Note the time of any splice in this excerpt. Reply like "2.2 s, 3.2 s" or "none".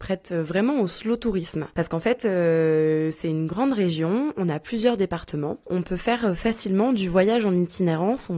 none